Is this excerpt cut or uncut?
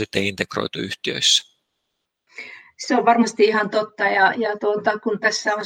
uncut